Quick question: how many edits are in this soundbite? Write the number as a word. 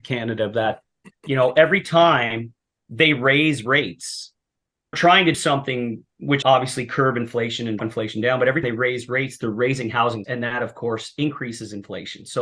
six